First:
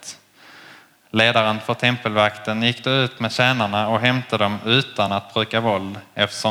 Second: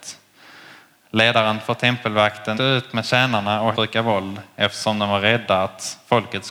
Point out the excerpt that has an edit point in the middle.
second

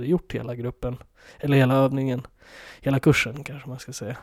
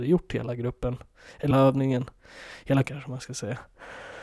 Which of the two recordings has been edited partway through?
second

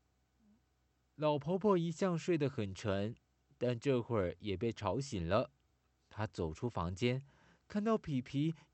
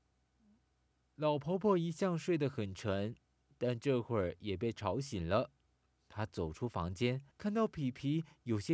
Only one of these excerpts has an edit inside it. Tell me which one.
second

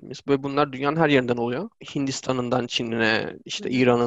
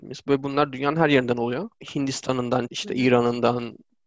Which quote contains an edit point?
second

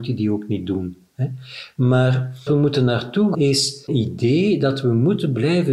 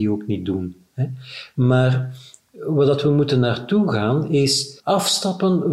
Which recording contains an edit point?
first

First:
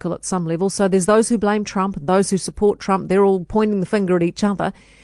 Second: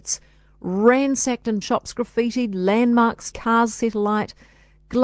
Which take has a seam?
second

